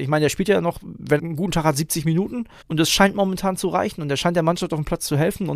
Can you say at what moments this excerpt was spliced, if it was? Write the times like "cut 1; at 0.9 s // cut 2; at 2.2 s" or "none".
cut 1; at 1.2 s // cut 2; at 2.6 s